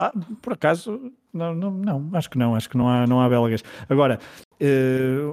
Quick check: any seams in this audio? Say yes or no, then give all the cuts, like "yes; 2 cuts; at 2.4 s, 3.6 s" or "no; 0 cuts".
no; 0 cuts